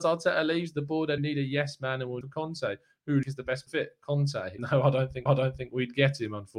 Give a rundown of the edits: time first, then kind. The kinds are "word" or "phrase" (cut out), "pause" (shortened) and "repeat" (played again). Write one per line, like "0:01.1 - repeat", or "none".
0:01.2 - word
0:02.2 - phrase
0:03.2 - phrase
0:03.7 - word
0:04.6 - word
0:05.3 - repeat